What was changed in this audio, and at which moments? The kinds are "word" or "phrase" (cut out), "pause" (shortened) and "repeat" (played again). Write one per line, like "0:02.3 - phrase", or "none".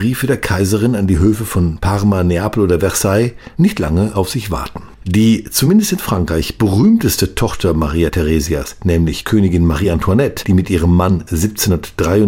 0:04.9 - pause